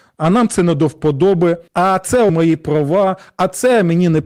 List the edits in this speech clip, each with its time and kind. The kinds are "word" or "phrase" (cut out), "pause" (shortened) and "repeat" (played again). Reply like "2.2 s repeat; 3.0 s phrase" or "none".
1.7 s pause; 2.3 s word